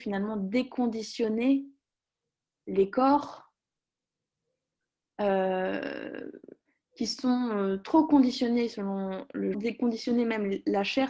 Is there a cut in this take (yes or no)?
yes